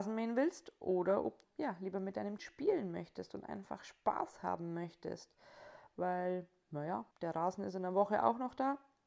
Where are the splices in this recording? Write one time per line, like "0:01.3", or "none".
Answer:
0:01.4
0:02.4
0:07.1